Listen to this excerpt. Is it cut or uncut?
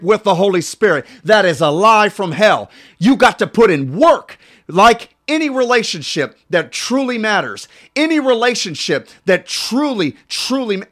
uncut